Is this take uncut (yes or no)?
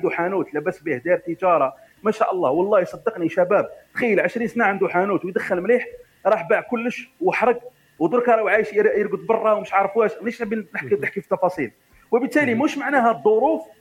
yes